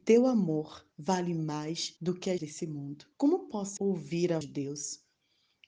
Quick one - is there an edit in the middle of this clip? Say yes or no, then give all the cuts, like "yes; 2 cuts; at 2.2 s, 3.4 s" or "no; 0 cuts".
yes; 6 cuts; at 0.9 s, 2.0 s, 2.4 s, 3.1 s, 3.8 s, 4.4 s